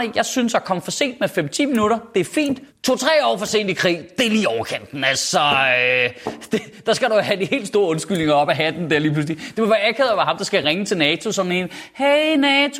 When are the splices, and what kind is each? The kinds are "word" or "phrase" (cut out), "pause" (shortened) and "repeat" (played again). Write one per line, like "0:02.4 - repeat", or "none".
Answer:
0:02.7 - pause